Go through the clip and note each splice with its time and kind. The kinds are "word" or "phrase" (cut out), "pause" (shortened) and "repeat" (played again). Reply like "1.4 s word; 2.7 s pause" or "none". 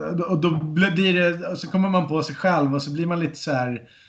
none